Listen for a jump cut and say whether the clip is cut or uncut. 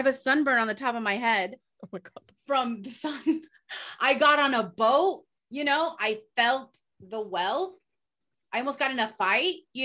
uncut